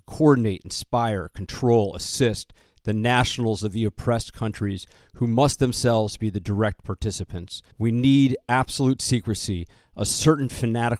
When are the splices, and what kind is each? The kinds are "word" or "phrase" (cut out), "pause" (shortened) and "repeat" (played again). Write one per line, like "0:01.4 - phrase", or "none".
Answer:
0:07.7 - pause